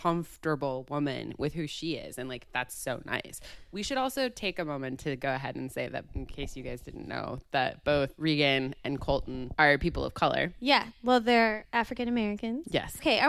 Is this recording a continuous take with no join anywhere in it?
yes; 0 cuts

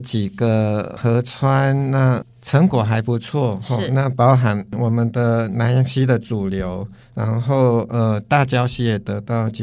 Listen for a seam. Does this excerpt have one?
no; 0 cuts

